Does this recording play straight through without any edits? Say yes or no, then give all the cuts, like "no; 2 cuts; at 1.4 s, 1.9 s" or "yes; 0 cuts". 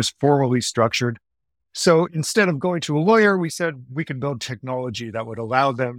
yes; 0 cuts